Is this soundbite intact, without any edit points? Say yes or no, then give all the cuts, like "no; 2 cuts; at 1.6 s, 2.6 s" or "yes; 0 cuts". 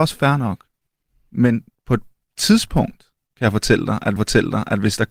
no; 1 cut; at 4.2 s